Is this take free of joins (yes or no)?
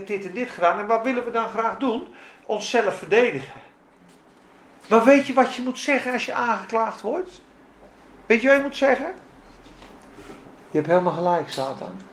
yes